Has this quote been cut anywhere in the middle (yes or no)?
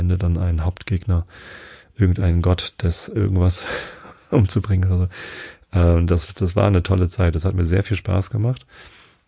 no